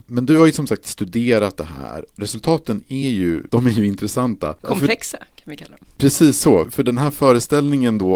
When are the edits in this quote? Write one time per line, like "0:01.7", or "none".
none

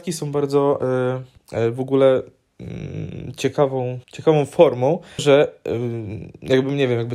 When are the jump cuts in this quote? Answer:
0:01.4
0:04.0
0:05.2

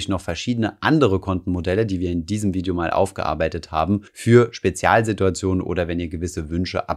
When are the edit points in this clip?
0:04.1

